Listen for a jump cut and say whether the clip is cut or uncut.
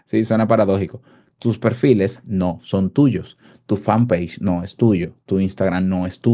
uncut